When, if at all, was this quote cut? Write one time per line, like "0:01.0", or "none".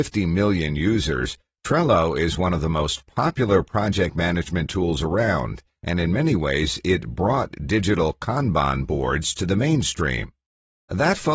none